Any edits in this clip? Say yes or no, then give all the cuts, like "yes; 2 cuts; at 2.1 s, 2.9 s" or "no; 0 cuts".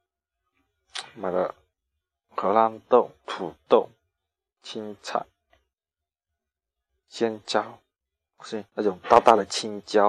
yes; 3 cuts; at 3.2 s, 4.4 s, 8.7 s